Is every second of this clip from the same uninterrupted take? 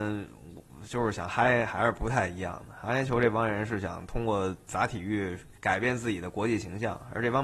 no; 1 cut; at 5.6 s

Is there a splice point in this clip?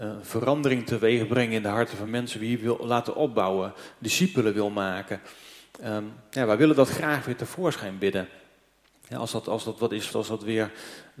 yes; 2 cuts; at 2.1 s, 10.1 s

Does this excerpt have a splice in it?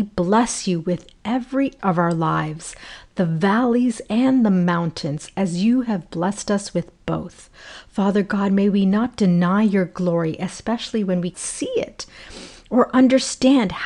yes; 2 cuts; at 1.8 s, 11.3 s

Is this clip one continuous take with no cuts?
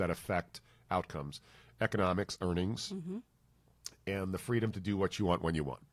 yes; 0 cuts

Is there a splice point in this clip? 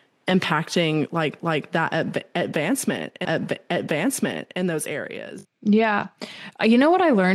yes; 3 cuts; at 1.4 s, 3.2 s, 5.5 s

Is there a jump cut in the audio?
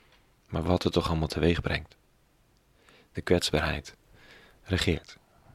no; 0 cuts

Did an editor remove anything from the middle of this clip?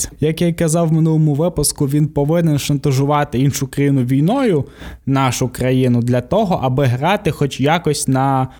no; 0 cuts

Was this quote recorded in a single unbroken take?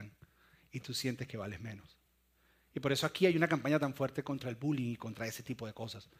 yes; 0 cuts

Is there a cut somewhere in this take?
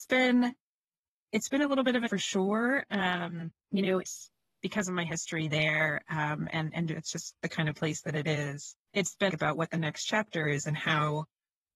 yes; 4 cuts; at 2.1 s, 4.0 s, 8.8 s, 9.3 s

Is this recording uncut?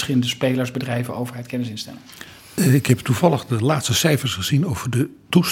yes; 0 cuts

